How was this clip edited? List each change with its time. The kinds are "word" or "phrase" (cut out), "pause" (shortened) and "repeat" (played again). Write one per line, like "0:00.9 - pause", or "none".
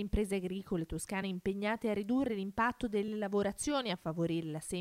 none